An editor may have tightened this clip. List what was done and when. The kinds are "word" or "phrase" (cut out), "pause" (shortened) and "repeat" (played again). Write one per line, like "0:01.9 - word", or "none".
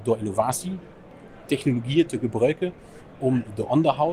none